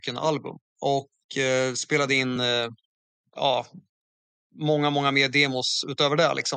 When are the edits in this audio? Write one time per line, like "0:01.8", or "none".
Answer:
none